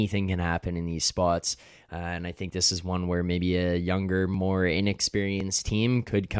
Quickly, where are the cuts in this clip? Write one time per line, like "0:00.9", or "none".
none